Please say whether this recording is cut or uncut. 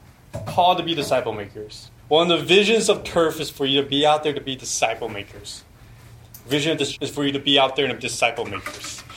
cut